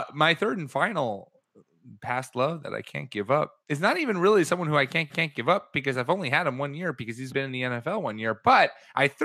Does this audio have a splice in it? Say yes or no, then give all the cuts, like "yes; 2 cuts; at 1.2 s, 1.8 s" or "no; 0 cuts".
yes; 3 cuts; at 3.6 s, 5.1 s, 7.3 s